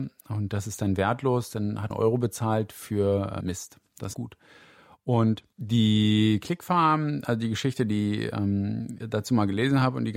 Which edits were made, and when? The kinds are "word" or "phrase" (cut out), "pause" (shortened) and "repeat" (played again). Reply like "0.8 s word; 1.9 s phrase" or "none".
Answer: 1.9 s word; 3.4 s word; 4.1 s phrase; 5.5 s pause; 9.0 s word